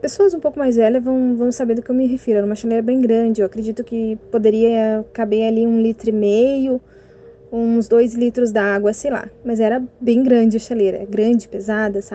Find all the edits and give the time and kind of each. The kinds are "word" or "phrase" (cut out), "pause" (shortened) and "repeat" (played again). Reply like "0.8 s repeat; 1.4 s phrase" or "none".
4.2 s pause